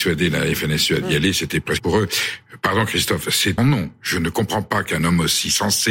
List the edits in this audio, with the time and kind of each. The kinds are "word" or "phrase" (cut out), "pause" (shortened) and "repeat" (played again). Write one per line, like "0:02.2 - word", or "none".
0:01.8 - phrase
0:03.6 - phrase